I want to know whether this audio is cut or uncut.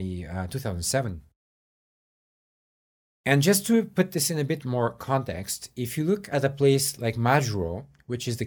uncut